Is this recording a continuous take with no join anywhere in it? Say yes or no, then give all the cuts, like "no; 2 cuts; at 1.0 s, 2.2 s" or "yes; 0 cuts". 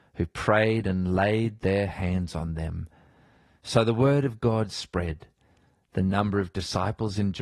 yes; 0 cuts